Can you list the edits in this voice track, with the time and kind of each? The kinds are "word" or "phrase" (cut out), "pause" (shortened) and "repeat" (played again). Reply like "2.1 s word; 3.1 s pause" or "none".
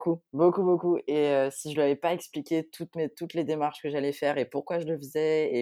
none